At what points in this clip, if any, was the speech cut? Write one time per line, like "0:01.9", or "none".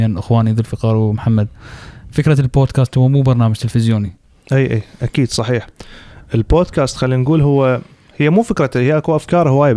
none